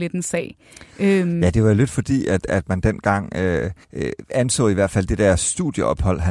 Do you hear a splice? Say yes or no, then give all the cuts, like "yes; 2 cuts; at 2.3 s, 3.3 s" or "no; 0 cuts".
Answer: yes; 1 cut; at 3.8 s